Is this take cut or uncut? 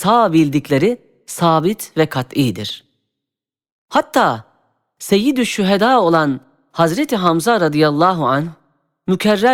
uncut